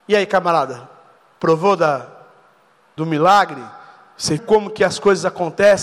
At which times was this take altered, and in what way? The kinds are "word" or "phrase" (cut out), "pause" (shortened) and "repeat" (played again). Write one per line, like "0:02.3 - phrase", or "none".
0:03.0 - word
0:04.4 - word